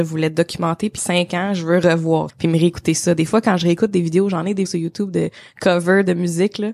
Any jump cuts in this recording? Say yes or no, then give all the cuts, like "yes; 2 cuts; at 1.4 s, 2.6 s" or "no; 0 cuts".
yes; 3 cuts; at 1.0 s, 2.3 s, 4.6 s